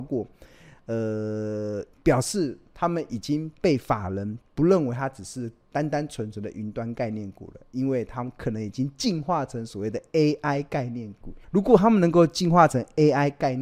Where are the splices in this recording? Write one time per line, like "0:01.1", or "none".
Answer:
0:01.9
0:11.4